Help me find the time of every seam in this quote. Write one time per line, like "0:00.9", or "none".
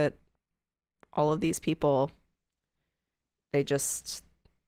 none